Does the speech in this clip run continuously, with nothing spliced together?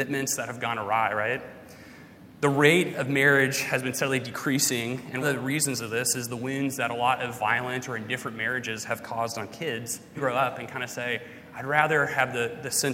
no; 2 cuts; at 5.2 s, 10.2 s

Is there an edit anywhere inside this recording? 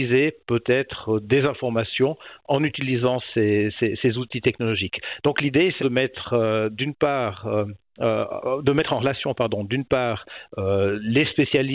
yes; 1 cut; at 5.8 s

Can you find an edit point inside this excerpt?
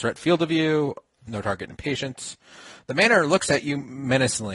no; 0 cuts

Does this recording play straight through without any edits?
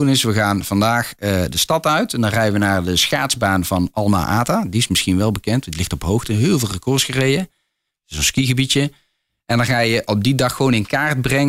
yes; 0 cuts

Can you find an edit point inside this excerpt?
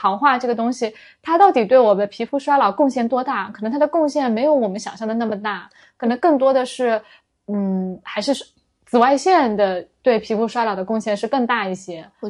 no; 0 cuts

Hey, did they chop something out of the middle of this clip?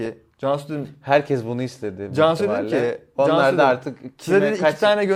no; 0 cuts

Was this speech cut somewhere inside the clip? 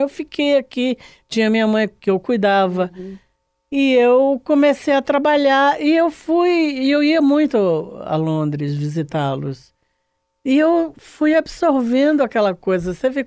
no; 0 cuts

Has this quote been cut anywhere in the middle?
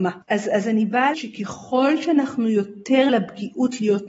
yes; 2 cuts; at 1.1 s, 3.1 s

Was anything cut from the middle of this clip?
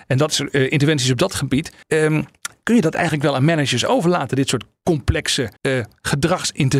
yes; 2 cuts; at 1.8 s, 5.6 s

